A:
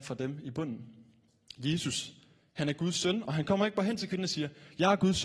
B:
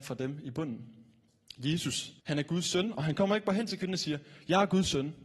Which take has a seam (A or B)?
B